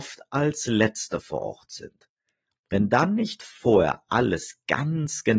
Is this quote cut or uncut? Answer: uncut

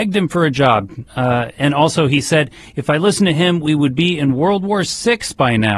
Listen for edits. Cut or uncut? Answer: uncut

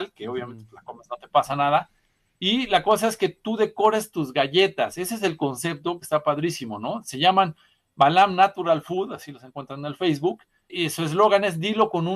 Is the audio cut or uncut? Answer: cut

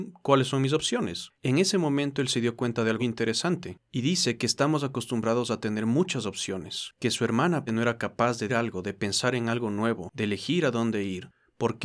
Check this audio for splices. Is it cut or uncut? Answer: cut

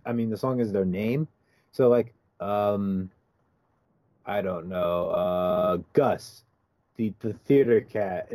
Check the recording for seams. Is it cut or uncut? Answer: uncut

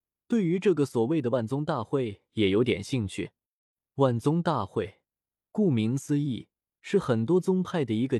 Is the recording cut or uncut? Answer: uncut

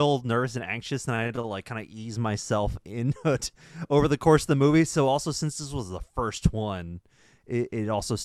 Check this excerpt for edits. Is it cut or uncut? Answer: uncut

